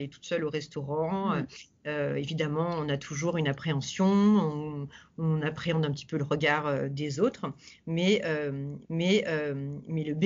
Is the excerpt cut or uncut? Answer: cut